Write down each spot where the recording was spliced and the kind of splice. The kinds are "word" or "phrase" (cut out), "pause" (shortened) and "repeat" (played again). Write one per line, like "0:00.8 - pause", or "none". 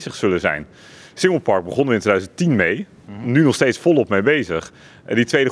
none

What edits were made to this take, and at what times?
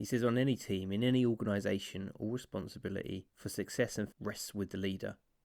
0:04.1 - word

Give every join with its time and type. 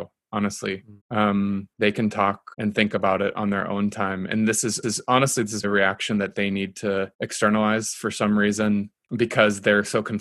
0:01.0 - pause
0:01.7 - pause
0:02.5 - pause
0:04.8 - repeat
0:05.6 - word
0:07.1 - pause

